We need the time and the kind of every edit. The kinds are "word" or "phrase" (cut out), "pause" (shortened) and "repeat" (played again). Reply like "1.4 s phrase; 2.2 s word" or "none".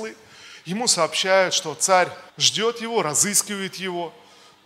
2.3 s pause